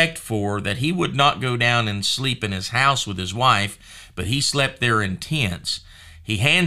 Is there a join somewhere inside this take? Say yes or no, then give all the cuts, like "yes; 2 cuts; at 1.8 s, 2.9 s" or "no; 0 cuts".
no; 0 cuts